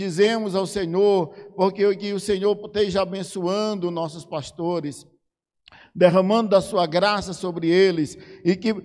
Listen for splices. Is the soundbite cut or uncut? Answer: uncut